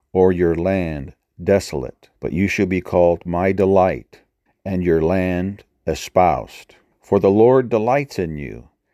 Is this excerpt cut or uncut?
cut